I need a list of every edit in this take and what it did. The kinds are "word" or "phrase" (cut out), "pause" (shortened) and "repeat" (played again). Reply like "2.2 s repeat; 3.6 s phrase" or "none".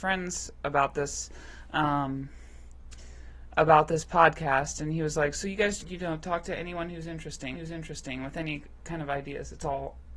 5.8 s word; 7.5 s repeat